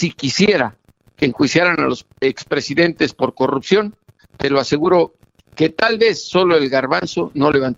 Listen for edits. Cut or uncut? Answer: uncut